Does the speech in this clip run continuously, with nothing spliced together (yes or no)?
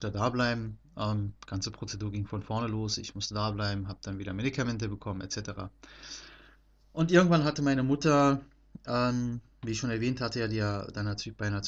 yes